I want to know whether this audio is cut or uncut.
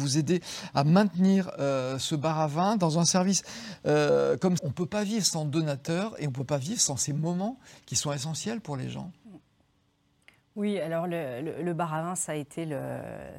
cut